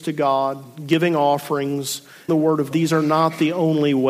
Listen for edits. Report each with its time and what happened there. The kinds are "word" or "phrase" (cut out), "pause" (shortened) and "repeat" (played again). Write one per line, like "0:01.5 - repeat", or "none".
0:02.3 - word
0:02.7 - word